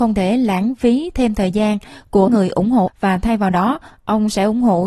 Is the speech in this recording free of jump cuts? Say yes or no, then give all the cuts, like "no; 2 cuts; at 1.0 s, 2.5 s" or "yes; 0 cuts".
no; 2 cuts; at 2.3 s, 2.9 s